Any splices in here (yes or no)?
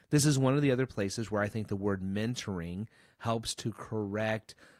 no